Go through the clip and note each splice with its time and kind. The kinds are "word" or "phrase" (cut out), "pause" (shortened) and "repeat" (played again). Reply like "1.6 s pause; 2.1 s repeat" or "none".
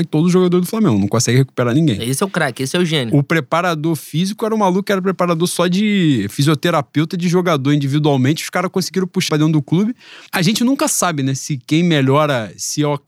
9.3 s word; 10.3 s pause